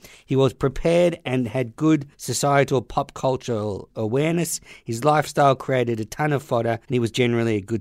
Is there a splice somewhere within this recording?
yes; 2 cuts; at 2.1 s, 6.8 s

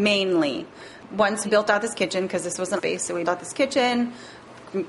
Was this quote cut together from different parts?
yes; 3 cuts; at 1.4 s, 2.8 s, 3.2 s

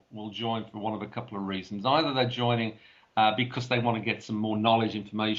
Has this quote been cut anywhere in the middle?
no; 0 cuts

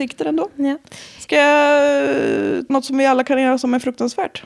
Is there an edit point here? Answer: yes; 1 cut; at 2.7 s

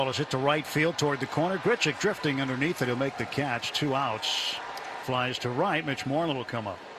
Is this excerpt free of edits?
no; 1 cut; at 5.0 s

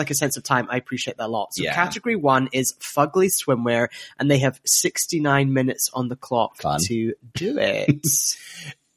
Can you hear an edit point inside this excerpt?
no; 0 cuts

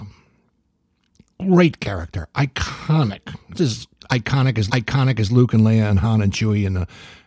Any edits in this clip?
yes; 2 cuts; at 3.5 s, 4.7 s

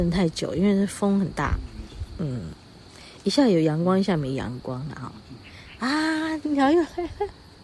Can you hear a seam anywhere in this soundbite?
yes; 1 cut; at 6.4 s

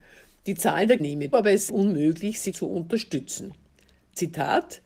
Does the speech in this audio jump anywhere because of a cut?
yes; 4 cuts; at 1.0 s, 1.3 s, 1.7 s, 2.5 s

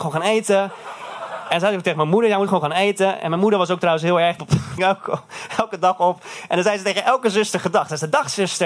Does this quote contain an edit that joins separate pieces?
yes; 2 cuts; at 4.4 s, 4.8 s

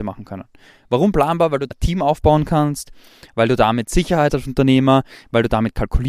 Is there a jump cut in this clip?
yes; 2 cuts; at 1.7 s, 4.3 s

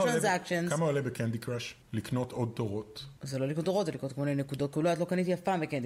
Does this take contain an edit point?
yes; 2 cuts; at 1.8 s, 3.2 s

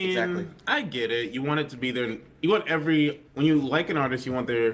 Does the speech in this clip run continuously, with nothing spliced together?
no; 1 cut; at 3.2 s

